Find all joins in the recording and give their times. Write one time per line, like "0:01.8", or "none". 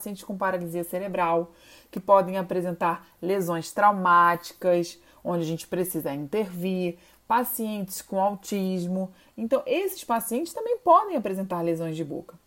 none